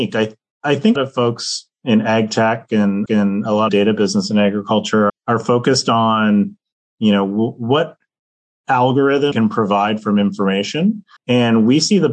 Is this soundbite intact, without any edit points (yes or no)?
no